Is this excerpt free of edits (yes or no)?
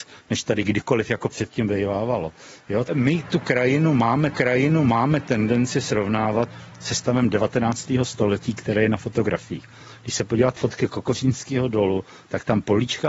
no